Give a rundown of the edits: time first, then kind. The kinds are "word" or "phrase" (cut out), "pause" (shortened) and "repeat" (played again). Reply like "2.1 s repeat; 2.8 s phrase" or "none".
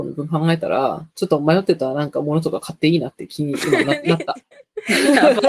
1.1 s pause